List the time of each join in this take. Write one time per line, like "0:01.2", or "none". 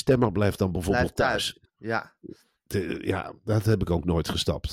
none